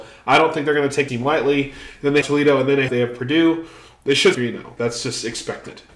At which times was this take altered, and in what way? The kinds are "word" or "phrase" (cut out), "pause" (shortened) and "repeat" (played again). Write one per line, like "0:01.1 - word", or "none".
0:01.1 - word
0:02.2 - word
0:02.9 - word
0:04.3 - word
0:04.8 - word